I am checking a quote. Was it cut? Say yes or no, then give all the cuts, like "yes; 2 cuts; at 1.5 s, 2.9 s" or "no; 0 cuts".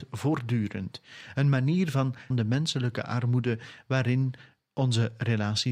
yes; 1 cut; at 2.3 s